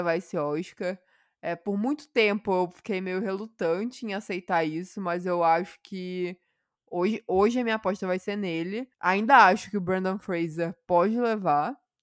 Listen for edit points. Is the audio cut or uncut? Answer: cut